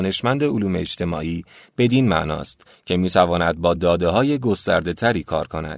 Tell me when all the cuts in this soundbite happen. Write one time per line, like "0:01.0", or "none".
none